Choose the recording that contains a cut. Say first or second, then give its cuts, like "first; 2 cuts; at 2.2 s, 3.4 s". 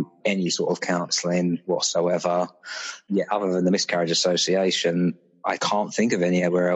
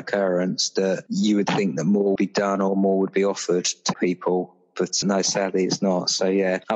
second; 3 cuts; at 2.2 s, 3.9 s, 5.0 s